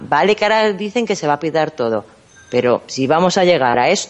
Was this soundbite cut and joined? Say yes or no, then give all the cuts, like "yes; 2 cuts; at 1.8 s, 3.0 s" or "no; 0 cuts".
no; 0 cuts